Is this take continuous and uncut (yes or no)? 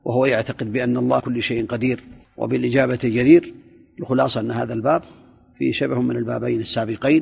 no